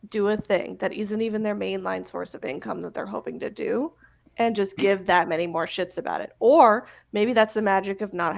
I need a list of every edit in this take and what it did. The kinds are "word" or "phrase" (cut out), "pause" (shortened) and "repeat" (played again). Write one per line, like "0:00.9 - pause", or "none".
none